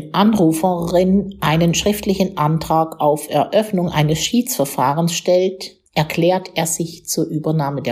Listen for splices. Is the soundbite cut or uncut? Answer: cut